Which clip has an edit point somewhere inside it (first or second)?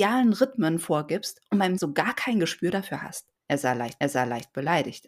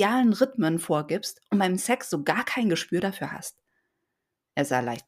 first